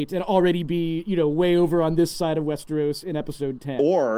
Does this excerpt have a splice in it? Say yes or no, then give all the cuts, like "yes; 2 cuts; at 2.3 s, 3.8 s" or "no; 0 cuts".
no; 0 cuts